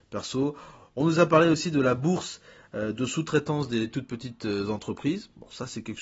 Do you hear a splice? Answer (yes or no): no